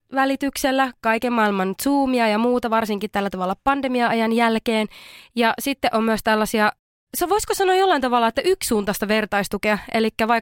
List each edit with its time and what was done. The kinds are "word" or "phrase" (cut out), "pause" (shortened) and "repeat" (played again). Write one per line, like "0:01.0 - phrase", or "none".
none